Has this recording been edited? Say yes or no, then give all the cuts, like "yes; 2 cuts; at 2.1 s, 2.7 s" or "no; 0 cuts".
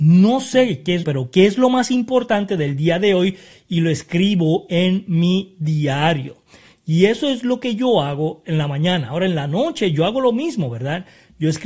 yes; 1 cut; at 1.0 s